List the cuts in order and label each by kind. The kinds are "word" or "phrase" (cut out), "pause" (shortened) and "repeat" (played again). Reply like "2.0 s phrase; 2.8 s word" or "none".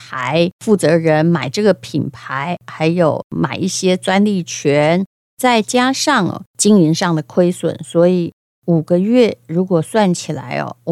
none